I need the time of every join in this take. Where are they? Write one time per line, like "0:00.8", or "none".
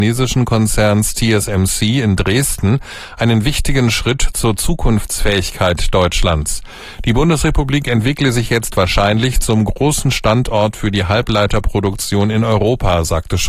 none